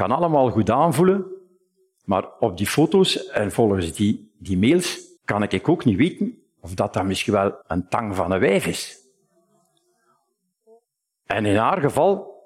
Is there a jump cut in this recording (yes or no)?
yes